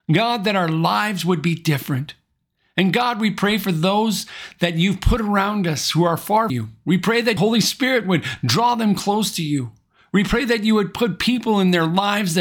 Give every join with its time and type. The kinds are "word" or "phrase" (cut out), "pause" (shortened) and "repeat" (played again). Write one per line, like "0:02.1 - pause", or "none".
0:06.5 - word
0:07.4 - word